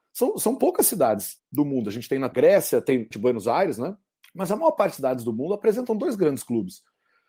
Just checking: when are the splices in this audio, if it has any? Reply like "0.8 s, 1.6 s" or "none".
1.4 s, 2.3 s, 3.1 s, 4.2 s, 5.0 s

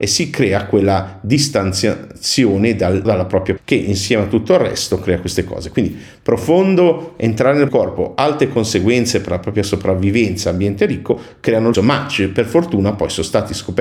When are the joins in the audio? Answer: 3.0 s, 3.6 s, 7.7 s, 11.7 s

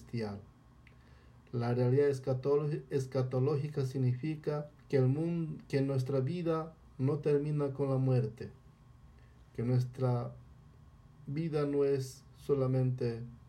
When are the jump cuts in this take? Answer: 4.8 s

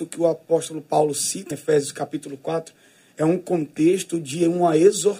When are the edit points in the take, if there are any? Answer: 1.5 s

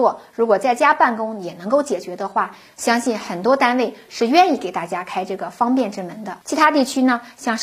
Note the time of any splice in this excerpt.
6.4 s

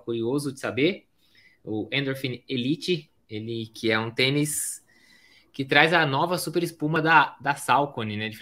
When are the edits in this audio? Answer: none

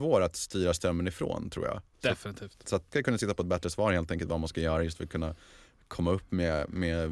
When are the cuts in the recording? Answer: 1.9 s, 2.9 s

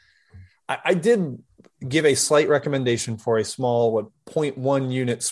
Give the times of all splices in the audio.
none

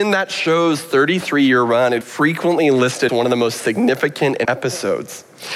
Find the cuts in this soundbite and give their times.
2.0 s, 3.1 s, 4.4 s

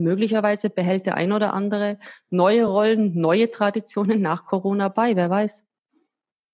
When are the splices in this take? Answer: none

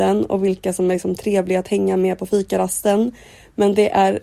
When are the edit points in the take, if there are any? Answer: none

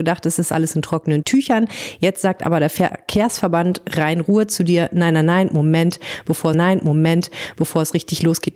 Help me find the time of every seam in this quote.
6.5 s

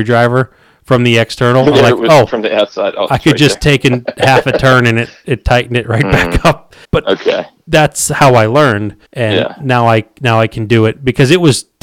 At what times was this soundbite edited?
6.8 s, 9.1 s

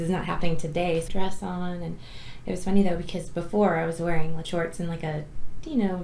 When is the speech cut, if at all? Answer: 1.1 s, 4.4 s

